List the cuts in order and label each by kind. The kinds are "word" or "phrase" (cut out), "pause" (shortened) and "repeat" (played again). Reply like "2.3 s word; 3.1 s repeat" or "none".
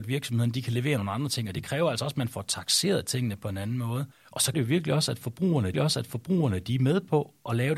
4.1 s pause; 4.5 s word; 5.7 s repeat